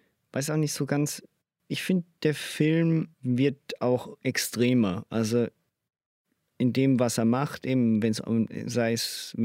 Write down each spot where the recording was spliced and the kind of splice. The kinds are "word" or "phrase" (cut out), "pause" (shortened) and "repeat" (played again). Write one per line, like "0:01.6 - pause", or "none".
0:03.1 - pause

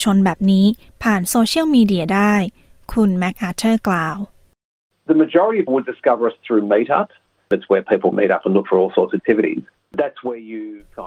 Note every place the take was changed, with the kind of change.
0:05.7 - word
0:08.1 - word
0:09.2 - word

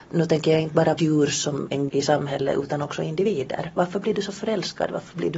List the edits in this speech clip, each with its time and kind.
0:01.0 - word
0:01.9 - word

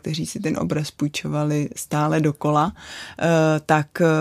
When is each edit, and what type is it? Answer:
none

